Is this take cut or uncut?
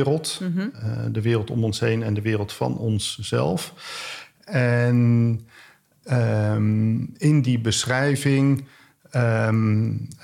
uncut